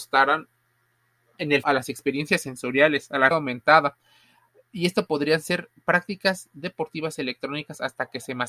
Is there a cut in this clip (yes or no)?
yes